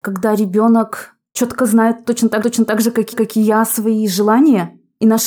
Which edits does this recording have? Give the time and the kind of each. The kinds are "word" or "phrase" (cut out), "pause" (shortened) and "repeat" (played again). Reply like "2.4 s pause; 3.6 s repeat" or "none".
2.4 s repeat; 3.1 s repeat